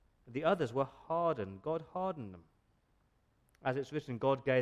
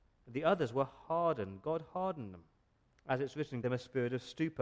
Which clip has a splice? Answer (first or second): second